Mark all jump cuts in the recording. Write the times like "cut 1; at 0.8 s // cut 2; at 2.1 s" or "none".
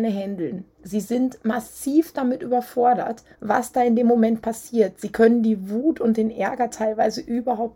cut 1; at 3.3 s